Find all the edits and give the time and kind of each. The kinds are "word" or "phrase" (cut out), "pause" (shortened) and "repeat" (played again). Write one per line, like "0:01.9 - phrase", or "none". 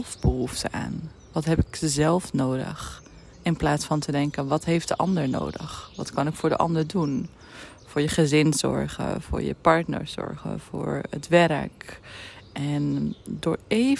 0:03.3 - pause